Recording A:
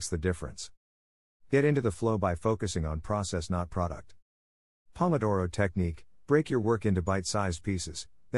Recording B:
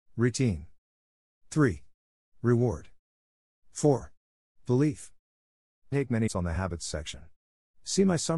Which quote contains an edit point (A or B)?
B